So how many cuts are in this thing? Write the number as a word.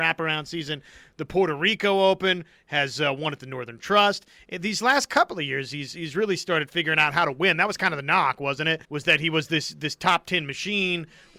one